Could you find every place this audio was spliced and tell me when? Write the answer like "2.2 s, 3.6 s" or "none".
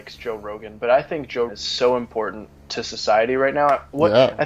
1.5 s